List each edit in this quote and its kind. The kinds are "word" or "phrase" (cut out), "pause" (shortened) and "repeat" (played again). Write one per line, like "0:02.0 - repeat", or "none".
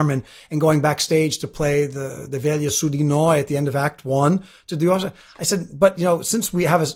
none